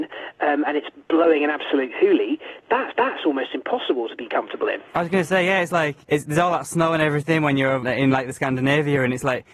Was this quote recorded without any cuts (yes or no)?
no